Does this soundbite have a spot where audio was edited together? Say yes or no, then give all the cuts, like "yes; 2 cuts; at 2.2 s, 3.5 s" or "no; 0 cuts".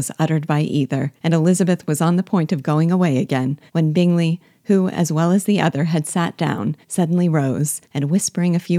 yes; 4 cuts; at 1.2 s, 3.7 s, 6.8 s, 7.8 s